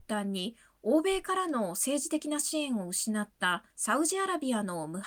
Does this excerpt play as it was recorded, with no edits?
no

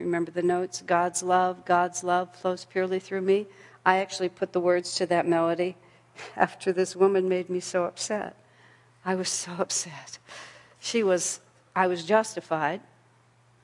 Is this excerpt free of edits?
yes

